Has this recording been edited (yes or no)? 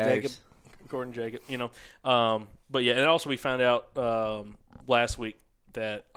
no